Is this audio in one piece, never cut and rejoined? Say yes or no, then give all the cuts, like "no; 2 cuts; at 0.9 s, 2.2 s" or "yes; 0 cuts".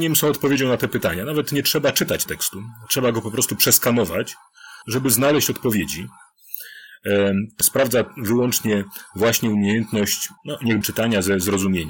no; 5 cuts; at 2.3 s, 4.8 s, 7.6 s, 10.4 s, 10.8 s